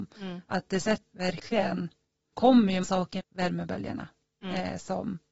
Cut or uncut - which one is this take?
cut